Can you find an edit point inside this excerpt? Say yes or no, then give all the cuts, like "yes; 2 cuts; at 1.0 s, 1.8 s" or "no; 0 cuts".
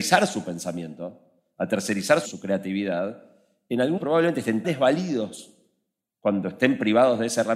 yes; 3 cuts; at 2.3 s, 4.0 s, 4.6 s